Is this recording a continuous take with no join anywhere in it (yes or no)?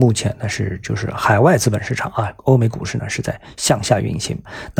no